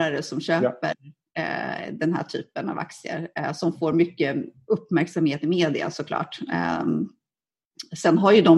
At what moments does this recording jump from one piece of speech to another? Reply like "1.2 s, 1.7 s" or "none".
none